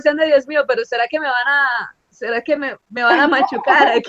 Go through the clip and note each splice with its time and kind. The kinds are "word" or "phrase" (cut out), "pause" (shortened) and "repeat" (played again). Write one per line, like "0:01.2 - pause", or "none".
none